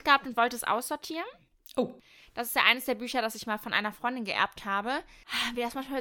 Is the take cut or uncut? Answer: uncut